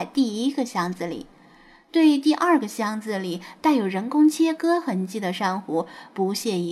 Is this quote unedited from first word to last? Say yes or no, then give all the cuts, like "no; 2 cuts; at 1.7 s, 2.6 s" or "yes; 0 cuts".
yes; 0 cuts